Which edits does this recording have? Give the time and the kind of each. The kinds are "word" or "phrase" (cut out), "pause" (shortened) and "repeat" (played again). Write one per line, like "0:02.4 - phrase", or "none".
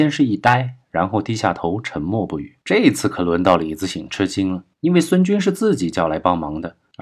0:02.6 - pause
0:04.7 - pause